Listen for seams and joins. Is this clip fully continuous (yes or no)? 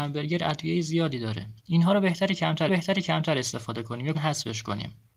no